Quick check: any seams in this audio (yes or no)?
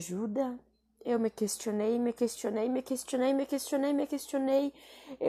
no